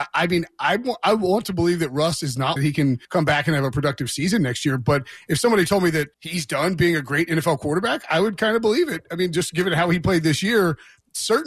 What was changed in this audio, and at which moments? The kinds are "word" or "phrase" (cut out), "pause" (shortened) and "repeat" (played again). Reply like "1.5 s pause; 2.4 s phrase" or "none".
2.6 s phrase; 3.0 s pause; 6.1 s pause